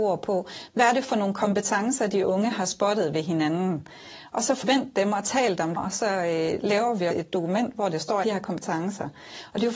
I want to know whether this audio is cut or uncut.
cut